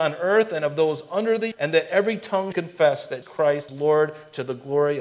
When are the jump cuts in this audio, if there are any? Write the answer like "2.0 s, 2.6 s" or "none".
1.5 s, 2.5 s, 3.2 s, 3.7 s